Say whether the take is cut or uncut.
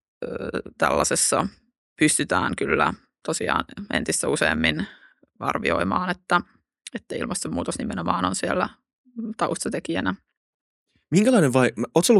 uncut